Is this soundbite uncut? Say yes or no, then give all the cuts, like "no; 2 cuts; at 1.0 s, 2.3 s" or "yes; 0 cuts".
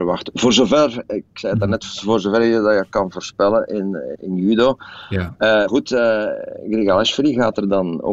no; 2 cuts; at 4.1 s, 5.7 s